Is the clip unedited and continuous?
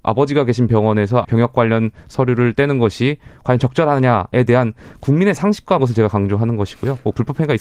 no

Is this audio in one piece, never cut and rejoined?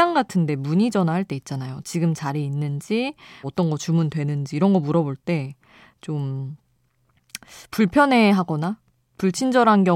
no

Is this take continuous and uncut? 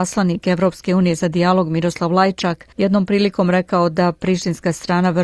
no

